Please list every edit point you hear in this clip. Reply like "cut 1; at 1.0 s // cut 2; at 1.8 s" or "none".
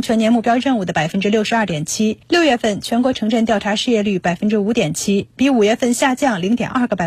cut 1; at 2.2 s

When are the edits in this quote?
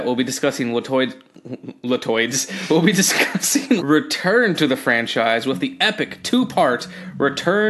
cut 1; at 3.8 s

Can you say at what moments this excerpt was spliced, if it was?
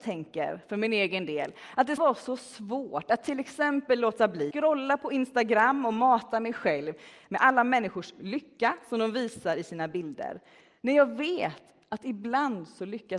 cut 1; at 2.0 s // cut 2; at 4.5 s

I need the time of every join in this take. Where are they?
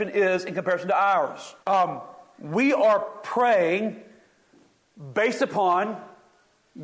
cut 1; at 1.6 s

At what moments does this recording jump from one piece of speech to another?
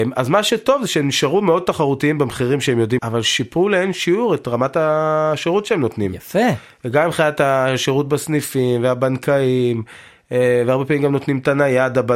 cut 1; at 3.0 s

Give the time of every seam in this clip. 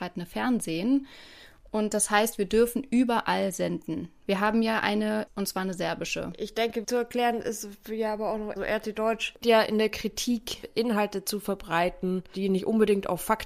cut 1; at 5.3 s // cut 2; at 6.8 s // cut 3; at 8.6 s // cut 4; at 9.4 s

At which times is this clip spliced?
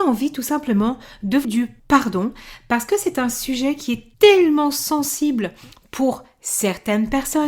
cut 1; at 1.4 s // cut 2; at 1.8 s // cut 3; at 4.1 s

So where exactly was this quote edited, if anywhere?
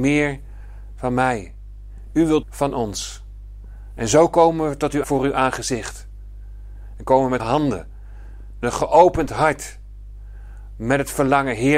cut 1; at 2.4 s // cut 2; at 5.0 s // cut 3; at 7.4 s // cut 4; at 8.6 s

